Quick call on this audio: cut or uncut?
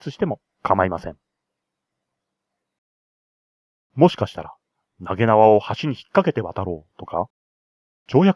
uncut